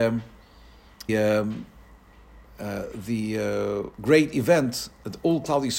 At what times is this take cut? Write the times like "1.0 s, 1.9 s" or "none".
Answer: 1.1 s, 3.9 s